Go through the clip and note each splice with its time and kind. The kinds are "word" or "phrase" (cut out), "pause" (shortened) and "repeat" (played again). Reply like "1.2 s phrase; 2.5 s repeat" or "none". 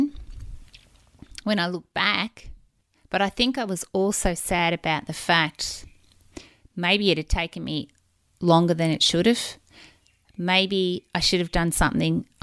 none